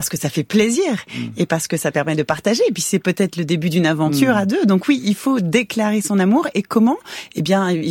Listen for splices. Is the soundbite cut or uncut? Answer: uncut